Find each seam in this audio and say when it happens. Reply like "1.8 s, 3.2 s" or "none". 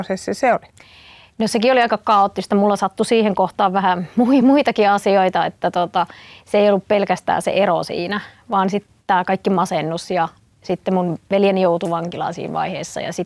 none